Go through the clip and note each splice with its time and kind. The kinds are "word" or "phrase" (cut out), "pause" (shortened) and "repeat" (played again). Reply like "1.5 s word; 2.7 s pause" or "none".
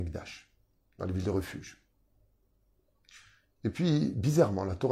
none